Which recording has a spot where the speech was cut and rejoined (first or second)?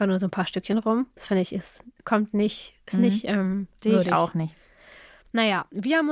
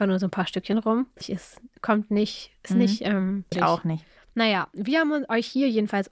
second